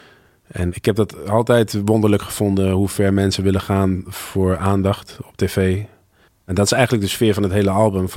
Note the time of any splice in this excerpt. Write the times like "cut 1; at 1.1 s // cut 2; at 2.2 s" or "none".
cut 1; at 6.3 s